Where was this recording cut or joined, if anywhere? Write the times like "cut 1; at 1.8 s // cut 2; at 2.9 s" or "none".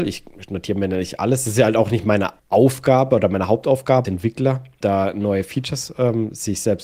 cut 1; at 2.4 s // cut 2; at 4.0 s // cut 3; at 4.8 s